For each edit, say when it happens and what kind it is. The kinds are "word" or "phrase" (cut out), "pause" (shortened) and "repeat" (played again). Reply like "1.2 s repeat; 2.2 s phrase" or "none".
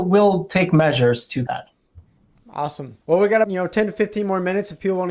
1.5 s word; 3.0 s pause; 3.4 s word